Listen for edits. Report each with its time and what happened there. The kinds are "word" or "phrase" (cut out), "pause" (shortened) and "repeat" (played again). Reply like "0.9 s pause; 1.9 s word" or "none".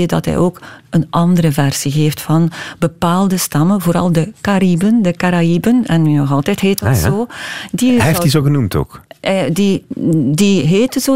none